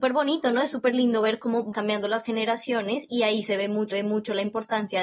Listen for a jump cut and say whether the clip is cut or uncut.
cut